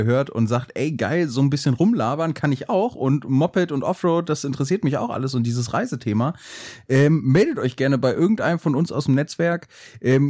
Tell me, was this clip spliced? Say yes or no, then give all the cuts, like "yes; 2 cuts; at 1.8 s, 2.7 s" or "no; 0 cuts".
no; 0 cuts